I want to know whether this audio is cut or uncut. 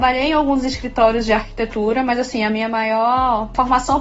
uncut